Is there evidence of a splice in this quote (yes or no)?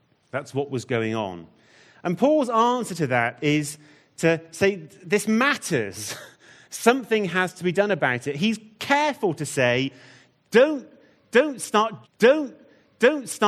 yes